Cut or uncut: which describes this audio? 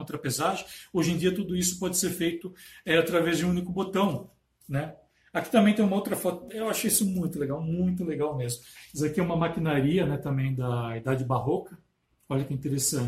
uncut